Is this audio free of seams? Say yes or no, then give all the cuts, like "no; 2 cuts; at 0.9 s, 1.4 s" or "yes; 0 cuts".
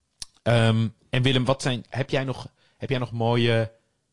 yes; 0 cuts